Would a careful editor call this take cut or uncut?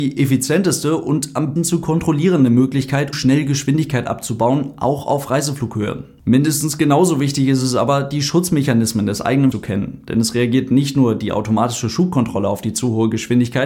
cut